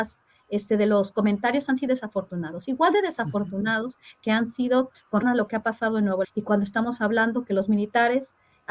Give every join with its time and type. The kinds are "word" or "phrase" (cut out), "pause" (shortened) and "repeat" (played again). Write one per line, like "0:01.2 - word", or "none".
0:01.9 - word
0:05.2 - word
0:06.2 - word